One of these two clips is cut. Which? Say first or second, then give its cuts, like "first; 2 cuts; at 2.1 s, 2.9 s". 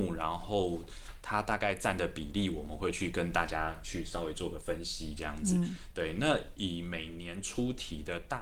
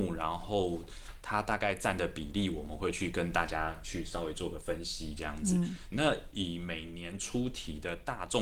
second; 1 cut; at 5.9 s